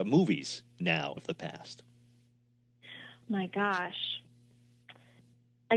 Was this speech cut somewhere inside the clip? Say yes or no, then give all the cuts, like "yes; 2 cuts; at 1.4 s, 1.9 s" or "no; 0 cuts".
yes; 1 cut; at 1.2 s